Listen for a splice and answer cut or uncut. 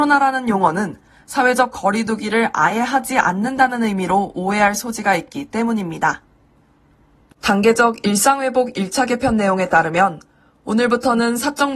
uncut